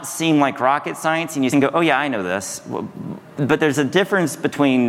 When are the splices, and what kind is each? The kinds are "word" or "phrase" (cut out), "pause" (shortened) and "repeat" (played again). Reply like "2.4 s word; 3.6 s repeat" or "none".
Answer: 1.5 s phrase